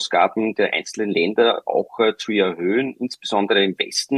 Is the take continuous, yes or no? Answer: yes